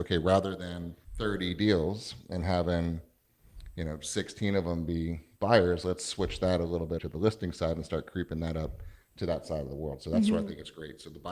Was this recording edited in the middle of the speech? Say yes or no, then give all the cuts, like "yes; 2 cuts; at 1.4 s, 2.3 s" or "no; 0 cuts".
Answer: yes; 2 cuts; at 1.0 s, 7.0 s